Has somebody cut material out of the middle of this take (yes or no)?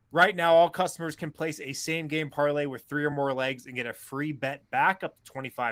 no